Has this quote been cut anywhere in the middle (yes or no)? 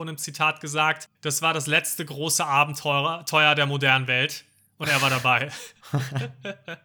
yes